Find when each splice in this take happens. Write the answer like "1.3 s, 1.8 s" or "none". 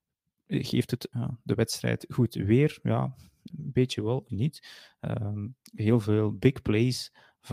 1.1 s, 3.5 s, 4.3 s